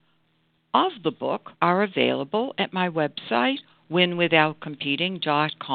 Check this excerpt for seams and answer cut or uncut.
cut